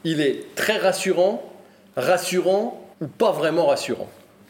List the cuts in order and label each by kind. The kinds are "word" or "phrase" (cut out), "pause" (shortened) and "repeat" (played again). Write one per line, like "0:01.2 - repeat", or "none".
0:02.9 - pause